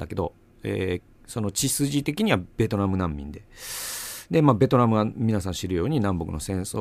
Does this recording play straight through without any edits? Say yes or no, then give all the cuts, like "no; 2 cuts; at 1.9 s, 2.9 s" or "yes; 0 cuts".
no; 1 cut; at 1.2 s